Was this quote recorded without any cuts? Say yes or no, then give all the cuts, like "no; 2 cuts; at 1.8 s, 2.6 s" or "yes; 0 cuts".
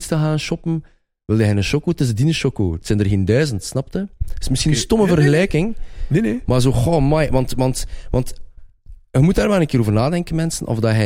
yes; 0 cuts